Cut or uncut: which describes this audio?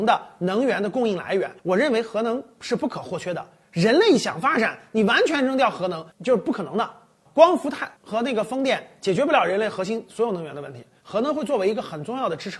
cut